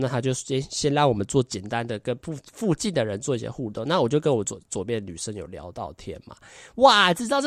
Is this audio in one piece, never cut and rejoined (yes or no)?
yes